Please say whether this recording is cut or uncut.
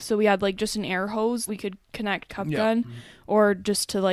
cut